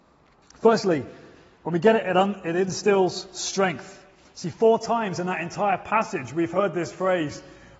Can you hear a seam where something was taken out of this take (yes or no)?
no